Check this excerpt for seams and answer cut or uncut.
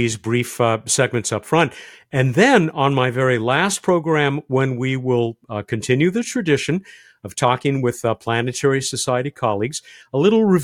uncut